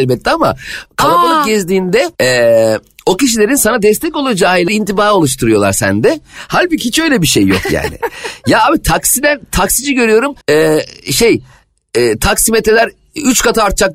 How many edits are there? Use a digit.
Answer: 3